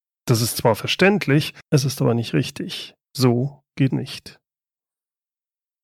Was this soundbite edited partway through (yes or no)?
yes